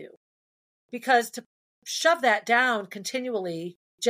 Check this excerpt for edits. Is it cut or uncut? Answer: uncut